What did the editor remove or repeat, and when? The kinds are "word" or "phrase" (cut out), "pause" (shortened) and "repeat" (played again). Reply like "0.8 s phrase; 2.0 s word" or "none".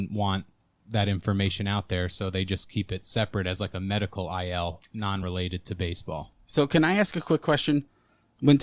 none